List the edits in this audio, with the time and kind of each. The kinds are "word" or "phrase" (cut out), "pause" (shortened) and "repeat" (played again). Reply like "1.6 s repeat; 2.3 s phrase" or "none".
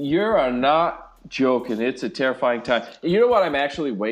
none